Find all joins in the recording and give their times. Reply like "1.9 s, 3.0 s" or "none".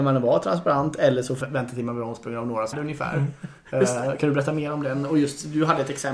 1.4 s, 2.7 s